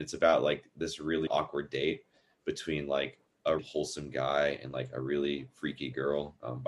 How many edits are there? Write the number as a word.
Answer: two